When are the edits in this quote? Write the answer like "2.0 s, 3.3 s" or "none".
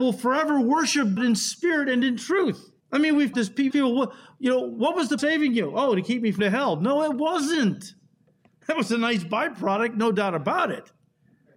1.2 s, 2.8 s, 3.3 s, 3.7 s, 5.2 s, 6.4 s